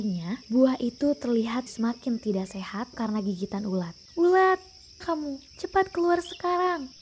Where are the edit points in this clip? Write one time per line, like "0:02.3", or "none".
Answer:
0:01.7
0:02.9
0:05.0
0:05.5